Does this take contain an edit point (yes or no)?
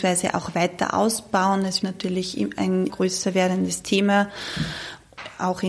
yes